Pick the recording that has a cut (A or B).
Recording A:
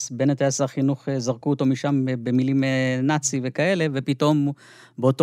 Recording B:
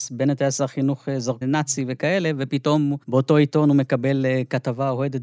B